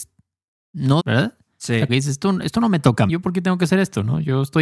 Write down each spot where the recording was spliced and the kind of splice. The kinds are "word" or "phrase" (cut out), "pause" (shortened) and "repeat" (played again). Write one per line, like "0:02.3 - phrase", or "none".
0:01.0 - word
0:01.9 - word
0:03.1 - word